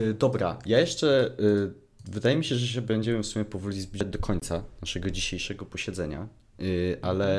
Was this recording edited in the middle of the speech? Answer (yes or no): no